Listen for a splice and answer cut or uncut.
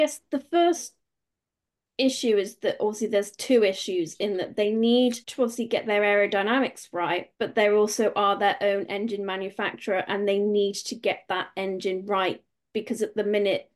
cut